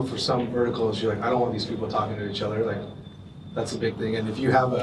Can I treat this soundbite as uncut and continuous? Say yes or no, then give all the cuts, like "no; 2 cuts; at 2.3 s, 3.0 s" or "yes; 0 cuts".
yes; 0 cuts